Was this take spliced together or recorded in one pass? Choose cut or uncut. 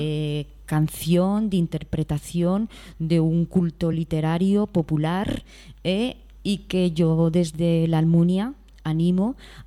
uncut